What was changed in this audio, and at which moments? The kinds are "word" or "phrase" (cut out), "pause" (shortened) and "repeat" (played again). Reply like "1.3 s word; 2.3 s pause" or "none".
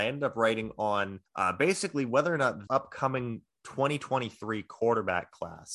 1.3 s pause; 2.7 s word